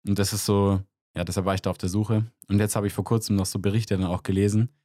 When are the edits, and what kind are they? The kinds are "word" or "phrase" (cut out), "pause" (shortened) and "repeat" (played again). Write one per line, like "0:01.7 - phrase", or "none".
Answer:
none